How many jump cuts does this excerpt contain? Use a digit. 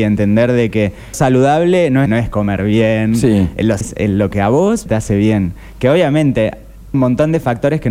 5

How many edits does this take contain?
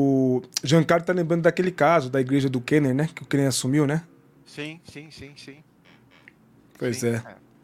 0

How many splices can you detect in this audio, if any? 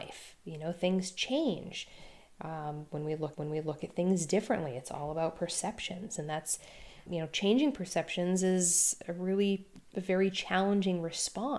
3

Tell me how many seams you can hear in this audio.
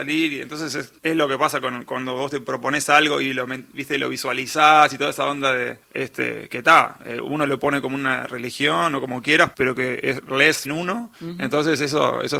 4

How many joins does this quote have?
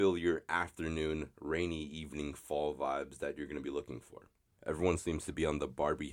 1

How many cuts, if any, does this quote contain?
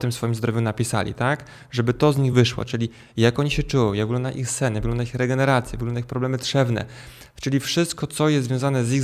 0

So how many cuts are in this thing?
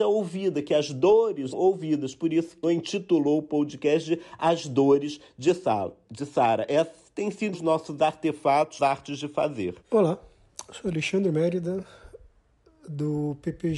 6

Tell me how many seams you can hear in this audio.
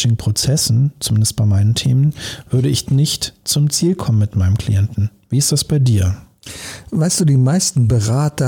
1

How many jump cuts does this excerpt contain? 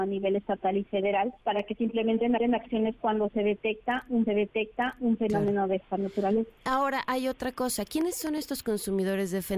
3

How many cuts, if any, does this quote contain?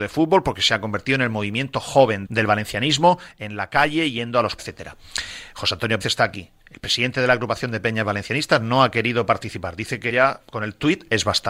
5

